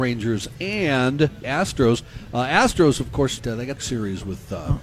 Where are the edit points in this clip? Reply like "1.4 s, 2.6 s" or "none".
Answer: 1.4 s, 3.4 s, 3.8 s